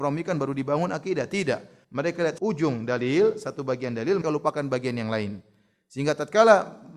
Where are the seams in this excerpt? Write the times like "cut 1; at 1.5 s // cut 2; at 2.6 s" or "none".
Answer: cut 1; at 1.8 s // cut 2; at 2.4 s // cut 3; at 4.2 s